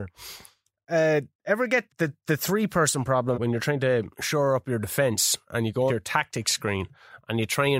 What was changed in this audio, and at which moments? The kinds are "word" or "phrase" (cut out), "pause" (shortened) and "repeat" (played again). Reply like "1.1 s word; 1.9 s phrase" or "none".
1.3 s pause; 1.9 s word; 3.3 s word; 4.1 s pause; 5.9 s word